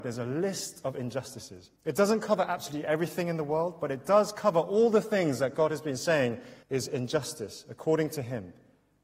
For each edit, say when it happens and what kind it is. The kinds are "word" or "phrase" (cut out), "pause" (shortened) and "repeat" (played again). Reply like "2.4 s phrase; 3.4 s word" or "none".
1.8 s pause; 6.6 s pause